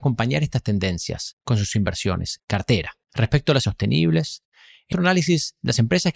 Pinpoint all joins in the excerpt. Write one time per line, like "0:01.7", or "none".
0:01.4
0:02.4
0:03.0
0:03.6
0:04.9